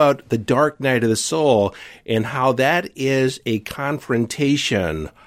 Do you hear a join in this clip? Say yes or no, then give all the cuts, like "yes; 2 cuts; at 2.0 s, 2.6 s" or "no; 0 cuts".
no; 0 cuts